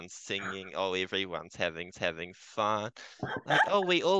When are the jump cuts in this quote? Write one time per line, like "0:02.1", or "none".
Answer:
0:01.9